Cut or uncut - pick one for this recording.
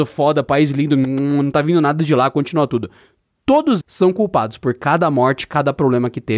cut